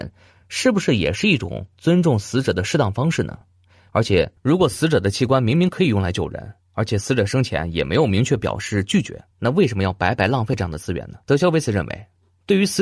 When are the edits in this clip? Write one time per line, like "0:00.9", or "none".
0:04.4
0:09.3
0:11.2